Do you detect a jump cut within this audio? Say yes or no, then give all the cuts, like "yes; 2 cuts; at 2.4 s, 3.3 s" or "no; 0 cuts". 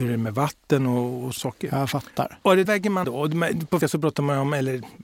yes; 4 cuts; at 1.4 s, 2.7 s, 3.0 s, 3.8 s